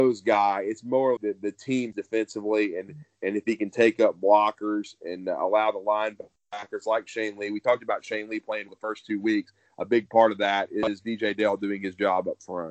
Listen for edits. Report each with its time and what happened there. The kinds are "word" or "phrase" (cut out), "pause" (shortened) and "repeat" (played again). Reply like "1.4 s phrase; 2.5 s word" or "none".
1.2 s word; 1.9 s word; 8.7 s word